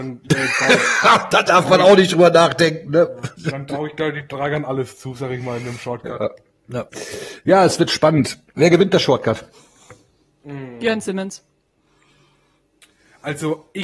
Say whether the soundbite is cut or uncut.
cut